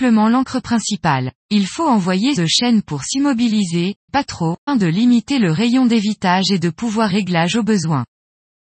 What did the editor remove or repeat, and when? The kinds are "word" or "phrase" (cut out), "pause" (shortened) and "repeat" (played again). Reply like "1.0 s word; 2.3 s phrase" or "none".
1.4 s pause; 2.4 s word; 4.1 s word; 4.7 s word; 7.1 s phrase